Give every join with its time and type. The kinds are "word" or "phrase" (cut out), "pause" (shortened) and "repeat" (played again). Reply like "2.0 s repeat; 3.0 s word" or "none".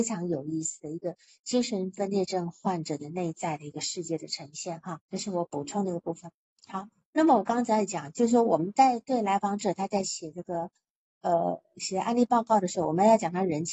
5.0 s pause